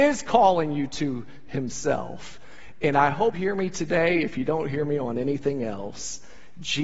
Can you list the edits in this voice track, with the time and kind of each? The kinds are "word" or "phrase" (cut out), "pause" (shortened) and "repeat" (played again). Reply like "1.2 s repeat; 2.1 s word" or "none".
3.3 s word